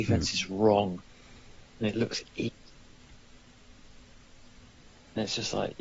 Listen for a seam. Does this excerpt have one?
no; 0 cuts

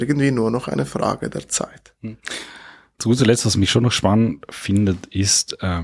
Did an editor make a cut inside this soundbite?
no; 0 cuts

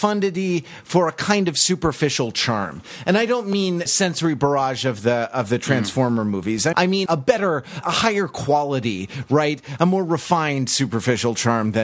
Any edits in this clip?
yes; 4 cuts; at 3.9 s, 6.7 s, 7.1 s, 7.8 s

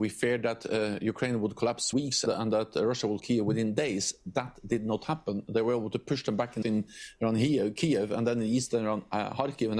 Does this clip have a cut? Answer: yes; 4 cuts; at 1.9 s, 2.3 s, 3.2 s, 6.6 s

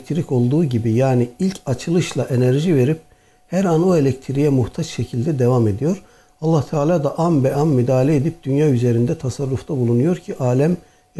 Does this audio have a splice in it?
no; 0 cuts

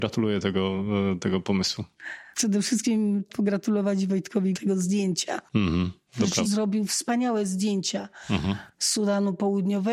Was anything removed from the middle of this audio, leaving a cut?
yes; 3 cuts; at 3.3 s, 4.5 s, 6.4 s

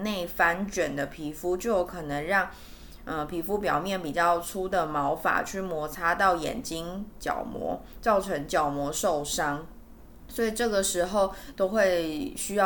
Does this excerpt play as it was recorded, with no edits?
yes; 0 cuts

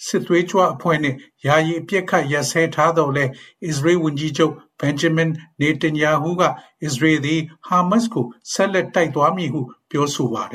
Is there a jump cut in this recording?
no; 0 cuts

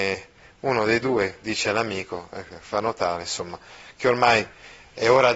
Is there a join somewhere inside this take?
no; 0 cuts

